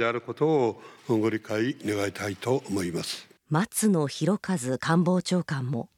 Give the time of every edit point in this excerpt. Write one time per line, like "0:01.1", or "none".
0:03.4